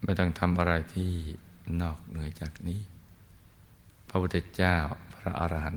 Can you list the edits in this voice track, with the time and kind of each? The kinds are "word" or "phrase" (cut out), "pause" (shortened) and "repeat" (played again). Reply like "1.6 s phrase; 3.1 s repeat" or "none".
none